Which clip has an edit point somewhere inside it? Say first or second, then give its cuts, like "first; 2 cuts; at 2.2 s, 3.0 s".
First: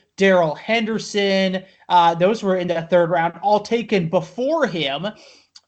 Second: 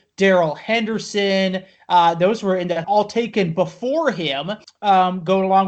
second; 2 cuts; at 2.8 s, 4.6 s